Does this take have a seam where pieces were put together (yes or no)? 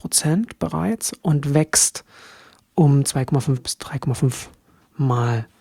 no